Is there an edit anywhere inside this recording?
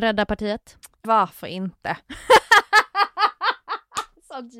yes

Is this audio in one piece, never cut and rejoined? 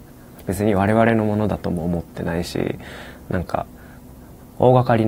yes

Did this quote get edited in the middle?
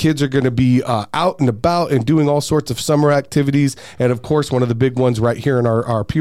no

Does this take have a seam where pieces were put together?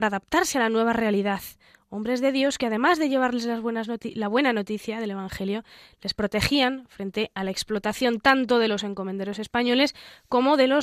no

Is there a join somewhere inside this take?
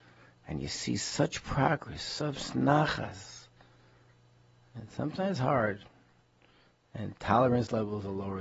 no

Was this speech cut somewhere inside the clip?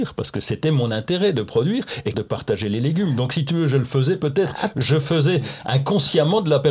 yes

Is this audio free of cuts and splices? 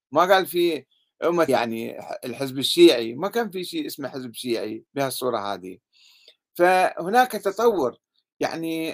no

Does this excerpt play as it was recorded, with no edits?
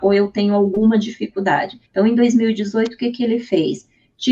no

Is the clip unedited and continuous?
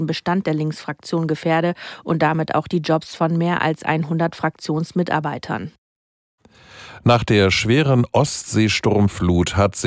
yes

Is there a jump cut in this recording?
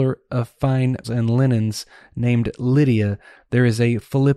yes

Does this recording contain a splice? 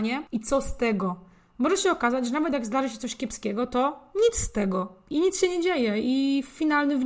no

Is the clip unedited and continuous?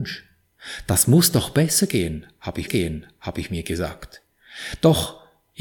no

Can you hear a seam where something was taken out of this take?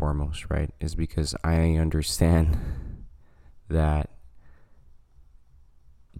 no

